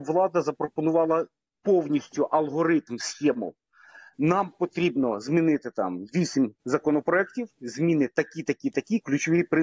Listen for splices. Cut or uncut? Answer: uncut